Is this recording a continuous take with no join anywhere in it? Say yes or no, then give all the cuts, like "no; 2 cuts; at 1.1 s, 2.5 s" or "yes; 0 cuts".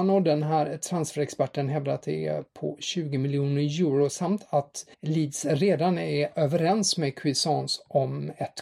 no; 1 cut; at 4.9 s